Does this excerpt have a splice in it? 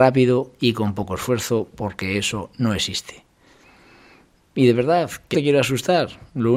yes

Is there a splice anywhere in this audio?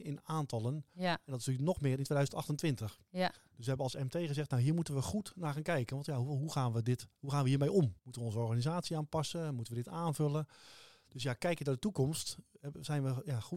yes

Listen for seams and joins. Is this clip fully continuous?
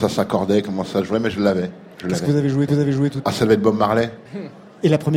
no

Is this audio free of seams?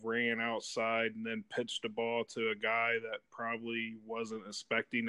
yes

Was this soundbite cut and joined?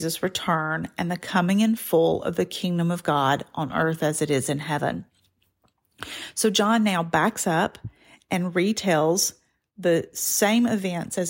no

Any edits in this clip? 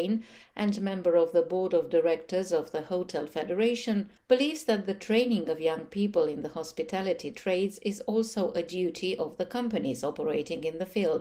no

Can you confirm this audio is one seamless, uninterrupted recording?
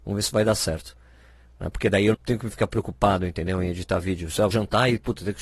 no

